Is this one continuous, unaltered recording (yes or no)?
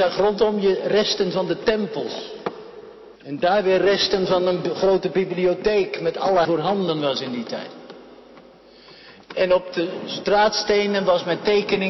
no